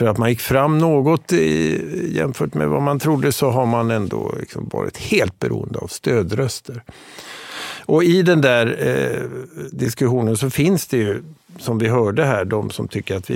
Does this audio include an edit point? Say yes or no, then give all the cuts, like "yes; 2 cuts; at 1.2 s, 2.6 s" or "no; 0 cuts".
no; 0 cuts